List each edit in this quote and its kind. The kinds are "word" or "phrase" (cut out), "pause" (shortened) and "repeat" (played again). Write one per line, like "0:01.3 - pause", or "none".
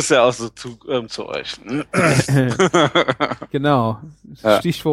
0:01.1 - word